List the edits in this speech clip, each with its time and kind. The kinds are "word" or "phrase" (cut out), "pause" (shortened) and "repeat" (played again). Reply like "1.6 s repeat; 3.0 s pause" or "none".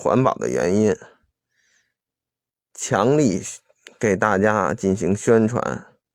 none